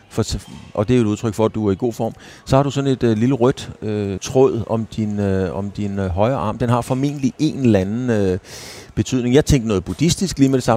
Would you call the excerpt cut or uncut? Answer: cut